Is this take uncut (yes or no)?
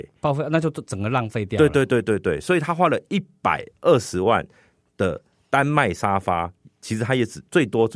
yes